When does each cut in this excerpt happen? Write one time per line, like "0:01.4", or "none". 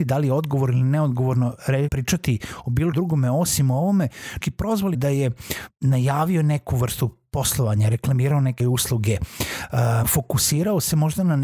0:01.9
0:02.9
0:04.4
0:04.9
0:05.7
0:08.6
0:10.0